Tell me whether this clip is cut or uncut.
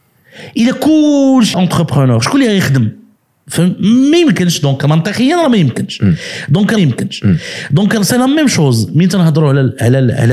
cut